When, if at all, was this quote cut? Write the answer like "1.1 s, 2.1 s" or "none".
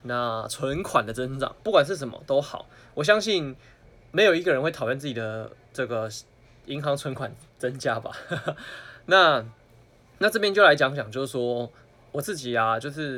1.6 s